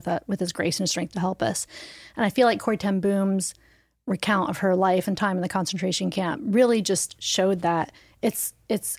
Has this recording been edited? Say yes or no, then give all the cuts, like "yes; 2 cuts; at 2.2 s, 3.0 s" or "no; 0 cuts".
no; 0 cuts